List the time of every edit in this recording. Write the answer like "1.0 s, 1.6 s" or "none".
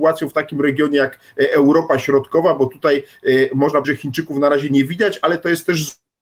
3.8 s